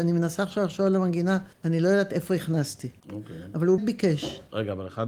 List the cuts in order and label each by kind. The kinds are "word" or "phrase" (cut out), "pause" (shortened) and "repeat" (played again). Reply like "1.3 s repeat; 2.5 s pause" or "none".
1.5 s pause; 3.0 s pause; 3.8 s word